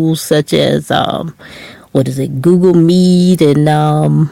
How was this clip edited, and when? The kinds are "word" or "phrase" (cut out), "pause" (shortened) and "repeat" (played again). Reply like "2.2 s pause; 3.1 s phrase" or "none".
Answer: none

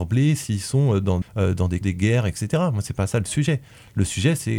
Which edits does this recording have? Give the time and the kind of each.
1.2 s word; 1.8 s word

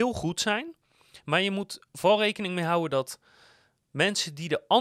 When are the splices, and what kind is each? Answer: none

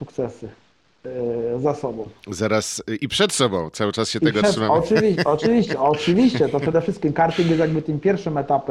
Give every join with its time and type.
none

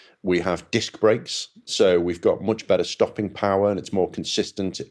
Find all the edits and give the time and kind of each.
none

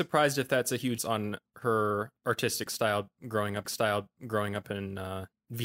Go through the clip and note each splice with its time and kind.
1.0 s word; 3.6 s repeat

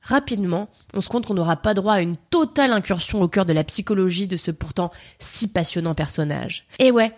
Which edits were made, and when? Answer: 1.1 s word

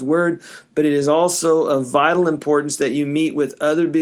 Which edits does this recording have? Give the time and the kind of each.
none

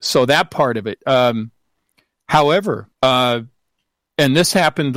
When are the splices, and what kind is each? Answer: 2.9 s pause

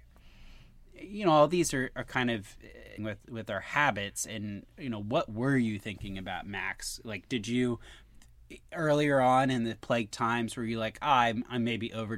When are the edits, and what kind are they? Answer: 3.0 s word

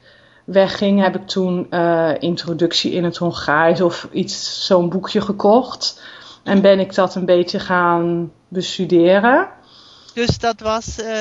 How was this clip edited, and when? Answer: none

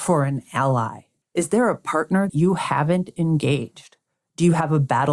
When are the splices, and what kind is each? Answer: 1.2 s pause; 2.3 s word

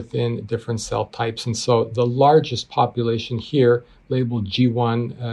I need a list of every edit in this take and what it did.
none

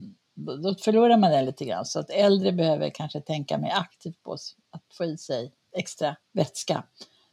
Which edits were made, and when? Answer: 6.2 s pause

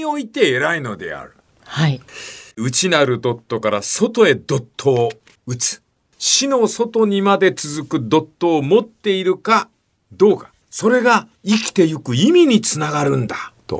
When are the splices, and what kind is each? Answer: 2.5 s pause; 5.4 s pause; 10.6 s pause; 11.4 s pause

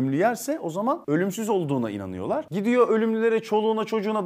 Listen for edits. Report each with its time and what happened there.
none

